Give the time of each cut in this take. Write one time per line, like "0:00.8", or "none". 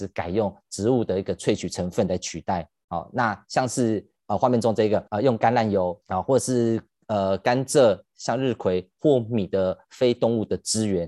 0:05.1
0:06.0